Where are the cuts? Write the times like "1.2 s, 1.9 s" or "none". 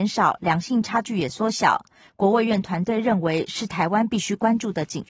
none